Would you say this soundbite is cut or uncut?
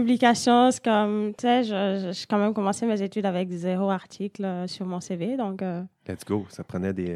uncut